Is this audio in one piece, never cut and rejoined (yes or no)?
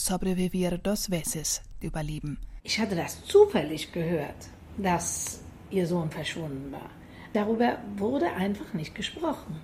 no